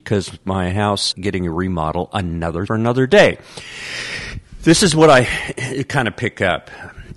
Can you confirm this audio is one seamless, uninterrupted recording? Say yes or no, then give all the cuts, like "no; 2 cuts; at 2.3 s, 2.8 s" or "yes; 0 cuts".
no; 2 cuts; at 1.1 s, 2.7 s